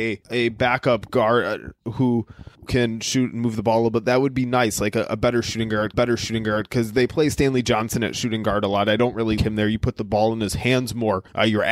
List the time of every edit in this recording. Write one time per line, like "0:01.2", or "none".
0:02.7
0:05.9
0:09.4